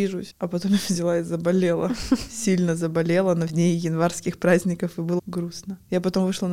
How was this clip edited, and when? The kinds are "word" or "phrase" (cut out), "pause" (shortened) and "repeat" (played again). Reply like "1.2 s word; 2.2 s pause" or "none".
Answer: 3.5 s phrase; 5.2 s word